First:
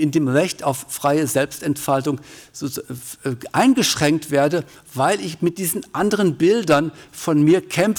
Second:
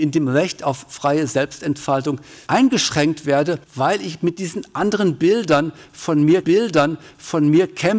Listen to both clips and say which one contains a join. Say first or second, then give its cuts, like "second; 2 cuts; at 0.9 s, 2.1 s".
second; 3 cuts; at 2.5 s, 3.6 s, 6.4 s